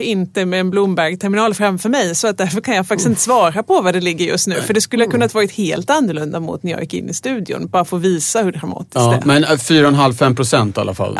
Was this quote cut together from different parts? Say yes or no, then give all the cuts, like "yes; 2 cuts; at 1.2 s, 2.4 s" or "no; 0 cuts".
no; 0 cuts